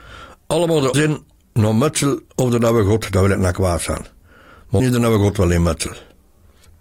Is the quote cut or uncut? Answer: cut